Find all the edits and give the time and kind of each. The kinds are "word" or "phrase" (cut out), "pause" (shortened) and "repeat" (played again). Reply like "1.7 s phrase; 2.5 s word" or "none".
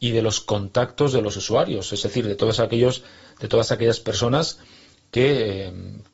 none